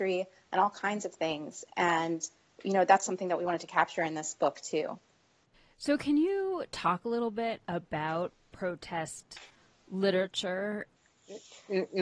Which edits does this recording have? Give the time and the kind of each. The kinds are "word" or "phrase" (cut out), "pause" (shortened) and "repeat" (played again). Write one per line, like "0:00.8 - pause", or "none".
none